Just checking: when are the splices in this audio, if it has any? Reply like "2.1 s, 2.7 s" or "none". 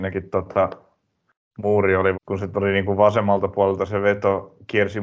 2.1 s